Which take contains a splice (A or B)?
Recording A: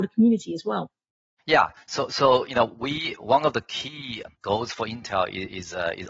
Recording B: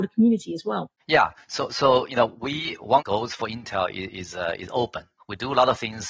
B